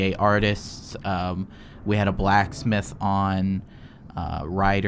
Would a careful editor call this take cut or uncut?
uncut